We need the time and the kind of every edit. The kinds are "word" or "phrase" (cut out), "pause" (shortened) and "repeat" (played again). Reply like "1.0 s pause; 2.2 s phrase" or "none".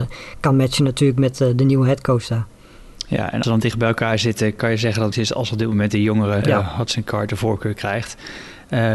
3.4 s word; 5.1 s phrase; 6.4 s word